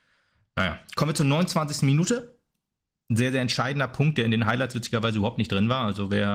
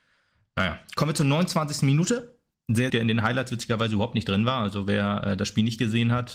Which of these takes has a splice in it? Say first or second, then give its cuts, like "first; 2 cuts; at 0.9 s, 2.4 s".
second; 2 cuts; at 2.5 s, 2.9 s